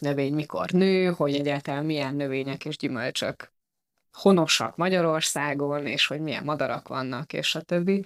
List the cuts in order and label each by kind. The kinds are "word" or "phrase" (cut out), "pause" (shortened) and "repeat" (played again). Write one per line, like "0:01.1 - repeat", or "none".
none